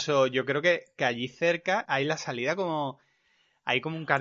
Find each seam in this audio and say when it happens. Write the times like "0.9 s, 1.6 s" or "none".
1.8 s

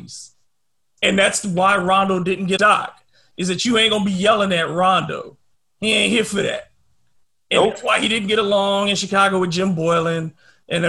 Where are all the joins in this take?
2.6 s

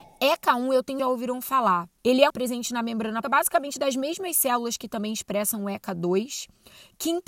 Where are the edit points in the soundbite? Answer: 1.0 s, 2.0 s, 2.3 s, 3.2 s

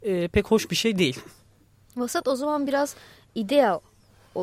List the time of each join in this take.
none

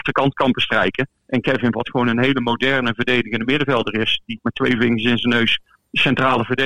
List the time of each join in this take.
1.2 s, 1.7 s, 4.4 s

